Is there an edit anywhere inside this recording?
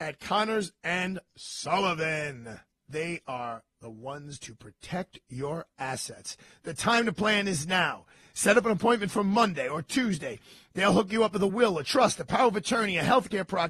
no; 0 cuts

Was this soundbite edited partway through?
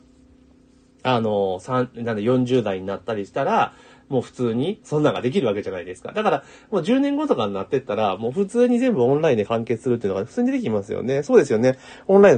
yes; 1 cut; at 4.8 s

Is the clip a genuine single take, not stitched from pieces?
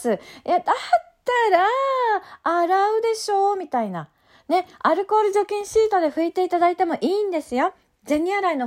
yes; 0 cuts

